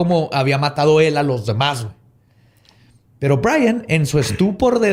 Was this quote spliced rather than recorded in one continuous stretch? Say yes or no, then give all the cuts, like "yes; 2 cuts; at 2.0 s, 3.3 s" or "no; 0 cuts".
no; 0 cuts